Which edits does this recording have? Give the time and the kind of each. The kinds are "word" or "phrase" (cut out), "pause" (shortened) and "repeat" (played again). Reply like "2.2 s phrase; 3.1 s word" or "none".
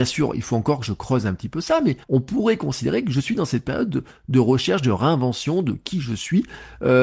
2.0 s pause